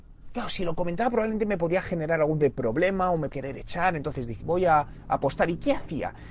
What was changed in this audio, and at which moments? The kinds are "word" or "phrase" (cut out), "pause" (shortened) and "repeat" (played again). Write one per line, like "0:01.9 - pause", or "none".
0:02.4 - word
0:03.3 - word
0:04.4 - word